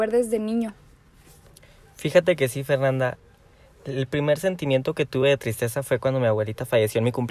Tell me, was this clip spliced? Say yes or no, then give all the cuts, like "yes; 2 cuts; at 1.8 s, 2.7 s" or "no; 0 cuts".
no; 0 cuts